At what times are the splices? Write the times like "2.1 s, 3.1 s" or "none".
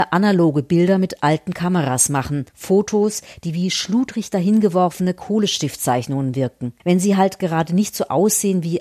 2.5 s, 6.8 s